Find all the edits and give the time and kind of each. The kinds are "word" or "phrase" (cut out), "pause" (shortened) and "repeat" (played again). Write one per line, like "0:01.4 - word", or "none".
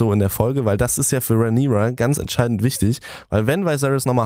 none